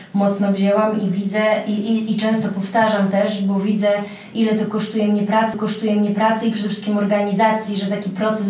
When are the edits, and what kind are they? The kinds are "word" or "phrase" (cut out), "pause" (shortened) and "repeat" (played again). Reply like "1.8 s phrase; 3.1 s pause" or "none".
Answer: 5.5 s repeat